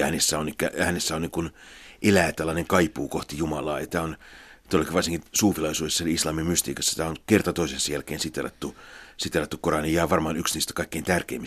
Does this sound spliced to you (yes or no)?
no